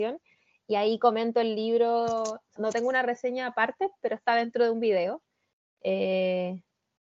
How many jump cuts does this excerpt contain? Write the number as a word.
one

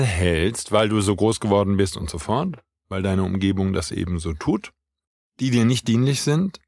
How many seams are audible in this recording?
zero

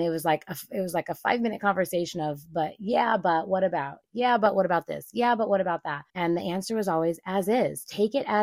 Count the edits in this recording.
one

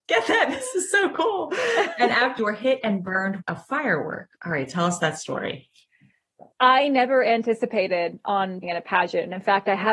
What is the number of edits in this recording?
four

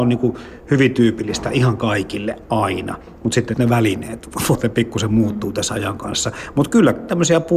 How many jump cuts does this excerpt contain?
two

